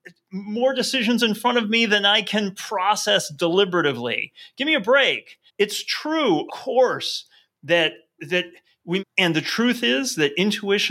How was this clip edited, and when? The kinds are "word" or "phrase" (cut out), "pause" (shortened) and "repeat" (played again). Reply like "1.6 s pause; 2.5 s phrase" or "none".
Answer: 5.5 s pause; 6.5 s word; 8.2 s word; 9.0 s phrase